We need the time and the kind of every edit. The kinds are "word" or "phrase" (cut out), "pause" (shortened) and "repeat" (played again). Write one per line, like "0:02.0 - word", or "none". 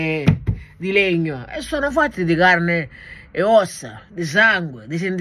none

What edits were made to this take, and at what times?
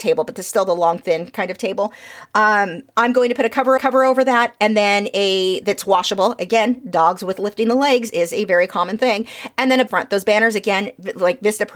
0:03.8 - repeat
0:09.9 - phrase

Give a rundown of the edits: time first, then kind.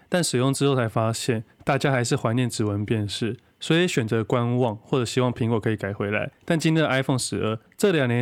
0:06.3 - pause
0:07.2 - phrase

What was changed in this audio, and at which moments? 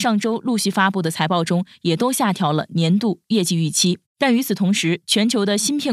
0:04.1 - pause

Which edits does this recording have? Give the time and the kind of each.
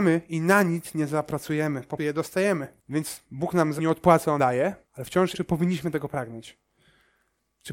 0:02.0 - word
0:02.8 - pause
0:03.8 - word
0:04.4 - word
0:04.8 - pause
0:05.3 - phrase

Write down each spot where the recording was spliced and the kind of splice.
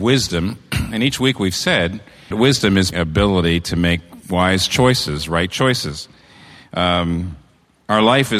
0:02.3 - word
0:02.9 - word

